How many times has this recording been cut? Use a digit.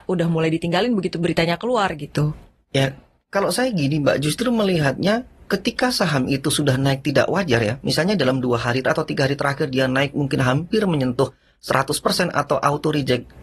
1